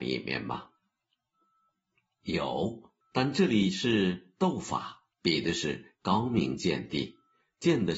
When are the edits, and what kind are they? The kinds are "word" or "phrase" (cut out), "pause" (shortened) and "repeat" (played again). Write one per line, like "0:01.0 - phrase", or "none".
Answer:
0:03.0 - pause
0:05.1 - pause